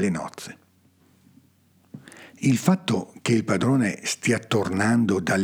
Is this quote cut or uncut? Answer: uncut